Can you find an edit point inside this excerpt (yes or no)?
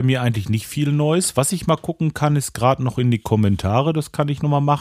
no